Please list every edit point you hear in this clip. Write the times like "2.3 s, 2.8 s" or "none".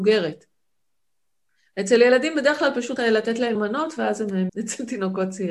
3.0 s, 3.6 s, 4.5 s